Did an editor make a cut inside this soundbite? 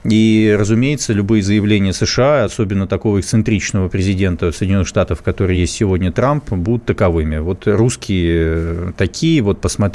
no; 0 cuts

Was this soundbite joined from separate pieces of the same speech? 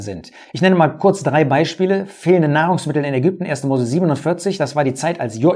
no; 0 cuts

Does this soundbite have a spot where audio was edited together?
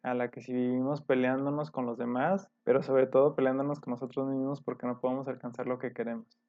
yes; 1 cut; at 2.6 s

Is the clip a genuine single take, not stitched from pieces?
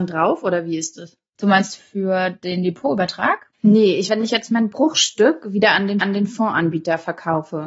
no; 4 cuts; at 1.8 s, 3.5 s, 4.1 s, 6.0 s

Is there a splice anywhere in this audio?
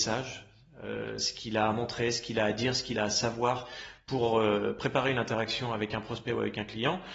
no; 0 cuts

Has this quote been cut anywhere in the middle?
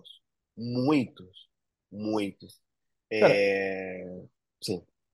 no; 0 cuts

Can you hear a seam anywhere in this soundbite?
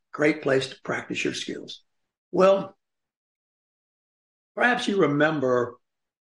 no; 0 cuts

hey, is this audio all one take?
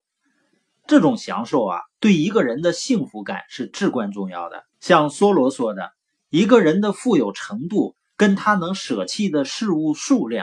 no; 1 cut; at 4.7 s

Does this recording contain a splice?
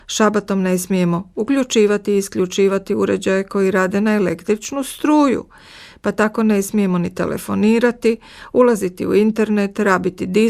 no; 0 cuts

